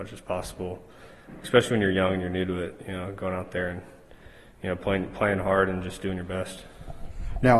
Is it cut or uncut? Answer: uncut